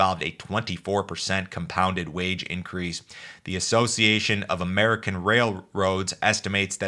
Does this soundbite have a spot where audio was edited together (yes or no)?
no